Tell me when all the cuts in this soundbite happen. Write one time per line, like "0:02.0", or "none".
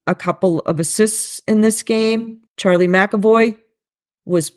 0:02.5